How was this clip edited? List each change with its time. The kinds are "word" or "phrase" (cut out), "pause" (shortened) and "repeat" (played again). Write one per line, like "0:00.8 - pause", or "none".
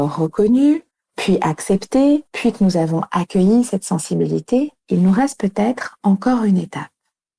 0:00.9 - pause
0:02.3 - pause
0:04.8 - pause